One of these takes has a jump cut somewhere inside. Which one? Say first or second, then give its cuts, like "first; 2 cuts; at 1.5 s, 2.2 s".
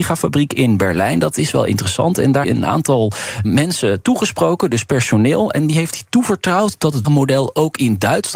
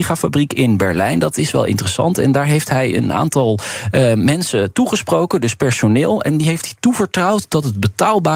first; 3 cuts; at 2.4 s, 3.4 s, 7.0 s